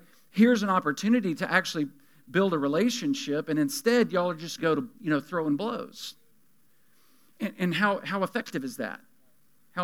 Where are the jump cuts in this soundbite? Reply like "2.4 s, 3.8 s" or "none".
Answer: 4.6 s, 4.9 s